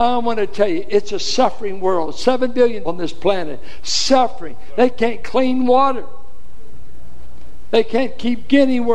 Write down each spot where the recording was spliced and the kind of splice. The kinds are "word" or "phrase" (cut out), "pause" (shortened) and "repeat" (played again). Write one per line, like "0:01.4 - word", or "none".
0:02.8 - word
0:05.2 - word